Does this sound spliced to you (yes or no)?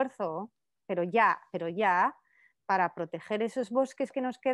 no